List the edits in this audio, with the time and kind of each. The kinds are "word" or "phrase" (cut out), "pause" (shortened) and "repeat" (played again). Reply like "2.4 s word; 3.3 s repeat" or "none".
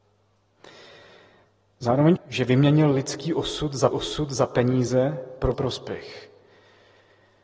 2.2 s word; 3.9 s repeat; 5.5 s word